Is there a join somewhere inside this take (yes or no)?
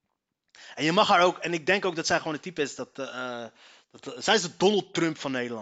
no